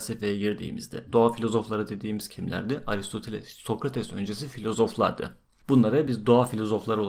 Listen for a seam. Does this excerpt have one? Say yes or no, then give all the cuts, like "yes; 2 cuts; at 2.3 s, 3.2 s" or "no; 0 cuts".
no; 0 cuts